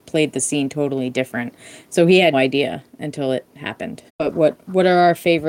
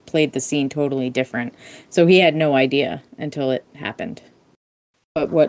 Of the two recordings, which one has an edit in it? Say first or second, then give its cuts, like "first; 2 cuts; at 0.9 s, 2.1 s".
first; 2 cuts; at 2.3 s, 4.1 s